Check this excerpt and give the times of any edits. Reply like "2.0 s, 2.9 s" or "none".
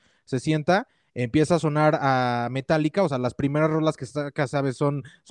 none